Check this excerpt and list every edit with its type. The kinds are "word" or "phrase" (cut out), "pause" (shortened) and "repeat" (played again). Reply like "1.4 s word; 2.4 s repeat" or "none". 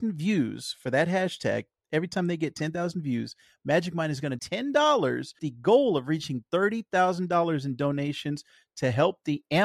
4.4 s word; 5.4 s word